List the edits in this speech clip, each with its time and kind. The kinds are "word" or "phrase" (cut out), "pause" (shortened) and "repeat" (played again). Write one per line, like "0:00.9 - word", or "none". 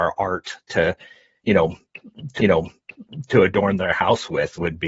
0:02.4 - repeat